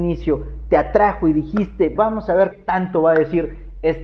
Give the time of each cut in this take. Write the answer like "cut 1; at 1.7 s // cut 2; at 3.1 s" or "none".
cut 1; at 2.0 s // cut 2; at 2.5 s